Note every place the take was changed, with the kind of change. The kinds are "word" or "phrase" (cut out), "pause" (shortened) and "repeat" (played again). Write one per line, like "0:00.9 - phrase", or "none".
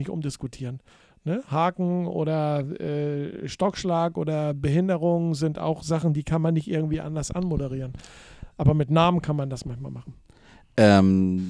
none